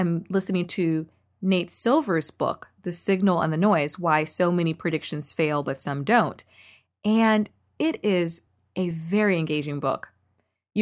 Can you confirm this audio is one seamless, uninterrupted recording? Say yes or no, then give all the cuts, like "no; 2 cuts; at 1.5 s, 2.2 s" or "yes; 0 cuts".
yes; 0 cuts